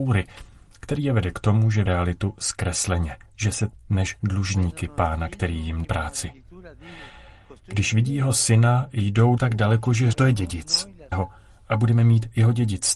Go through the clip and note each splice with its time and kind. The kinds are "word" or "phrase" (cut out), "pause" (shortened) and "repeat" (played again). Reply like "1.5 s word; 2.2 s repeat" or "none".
1.9 s word; 3.3 s pause; 3.7 s phrase; 5.8 s word; 9.4 s word; 10.1 s word; 11.1 s word